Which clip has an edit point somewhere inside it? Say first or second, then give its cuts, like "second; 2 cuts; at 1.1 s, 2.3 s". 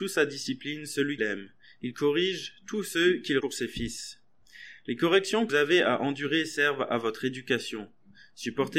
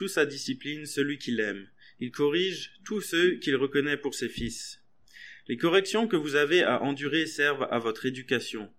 first; 3 cuts; at 1.2 s, 3.4 s, 5.5 s